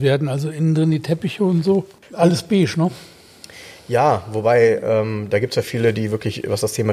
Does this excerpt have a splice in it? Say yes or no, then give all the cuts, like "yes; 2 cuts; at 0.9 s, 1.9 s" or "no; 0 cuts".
no; 0 cuts